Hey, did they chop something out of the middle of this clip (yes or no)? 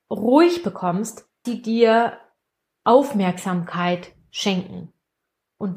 yes